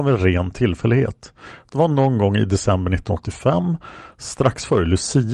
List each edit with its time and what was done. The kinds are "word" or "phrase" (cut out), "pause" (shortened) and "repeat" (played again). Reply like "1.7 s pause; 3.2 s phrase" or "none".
none